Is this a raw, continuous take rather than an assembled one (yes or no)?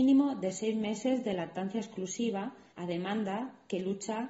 no